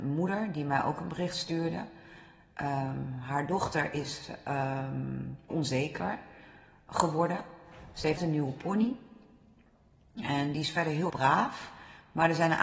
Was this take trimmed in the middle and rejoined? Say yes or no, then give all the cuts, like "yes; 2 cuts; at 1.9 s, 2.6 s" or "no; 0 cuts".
yes; 3 cuts; at 5.5 s, 8.2 s, 11.1 s